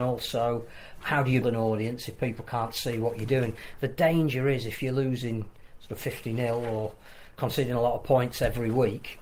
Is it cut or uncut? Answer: cut